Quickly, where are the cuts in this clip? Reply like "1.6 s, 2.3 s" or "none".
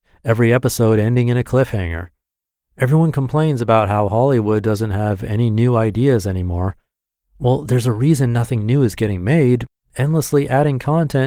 none

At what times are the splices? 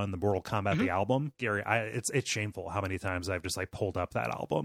1.3 s

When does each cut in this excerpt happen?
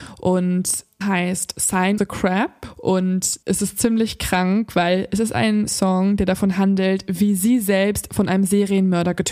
1.0 s, 2.0 s, 3.4 s

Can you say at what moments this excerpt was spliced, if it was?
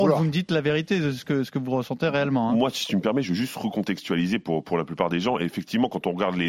none

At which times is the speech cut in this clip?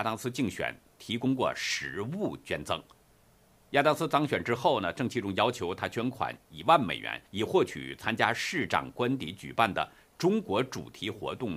7.3 s

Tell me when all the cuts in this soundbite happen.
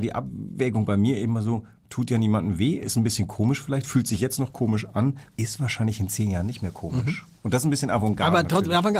5.3 s, 7.4 s

